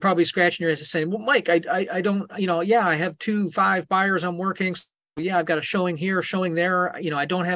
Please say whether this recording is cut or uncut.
uncut